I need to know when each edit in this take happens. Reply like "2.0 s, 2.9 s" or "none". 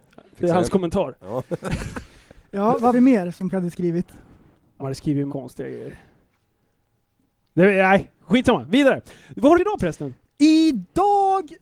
2.9 s, 3.5 s, 4.8 s, 5.3 s, 9.5 s